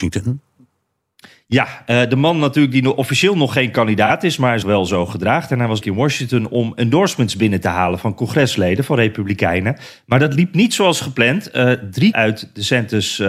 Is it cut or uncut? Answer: cut